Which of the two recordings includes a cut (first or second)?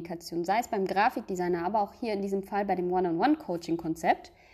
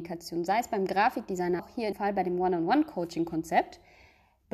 second